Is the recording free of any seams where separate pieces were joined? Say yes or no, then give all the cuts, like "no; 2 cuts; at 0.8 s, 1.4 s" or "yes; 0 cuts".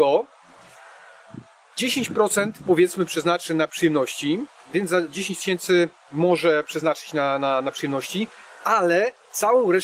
yes; 0 cuts